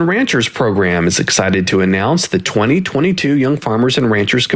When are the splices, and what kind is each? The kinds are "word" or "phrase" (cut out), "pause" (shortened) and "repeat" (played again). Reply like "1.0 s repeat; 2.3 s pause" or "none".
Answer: none